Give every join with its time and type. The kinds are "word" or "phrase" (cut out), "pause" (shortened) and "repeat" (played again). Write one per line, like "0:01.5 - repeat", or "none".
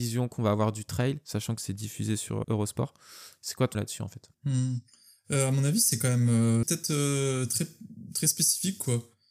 0:02.4 - word
0:03.7 - word
0:04.3 - pause
0:06.6 - phrase